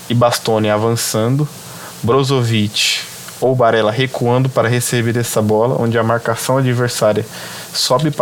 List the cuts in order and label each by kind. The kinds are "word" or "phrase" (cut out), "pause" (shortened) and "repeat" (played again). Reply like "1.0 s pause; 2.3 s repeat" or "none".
none